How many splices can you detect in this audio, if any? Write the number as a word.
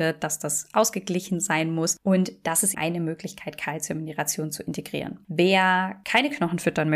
one